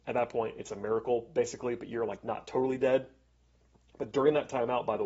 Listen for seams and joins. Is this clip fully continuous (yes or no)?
yes